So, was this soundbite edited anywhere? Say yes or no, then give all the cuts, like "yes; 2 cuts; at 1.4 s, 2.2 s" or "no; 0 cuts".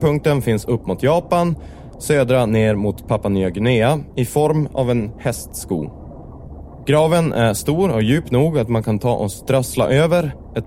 no; 0 cuts